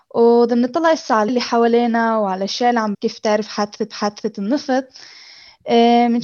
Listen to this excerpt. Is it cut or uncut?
cut